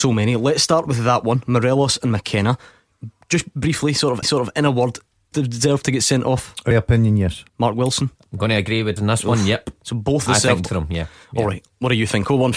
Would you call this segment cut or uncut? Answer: cut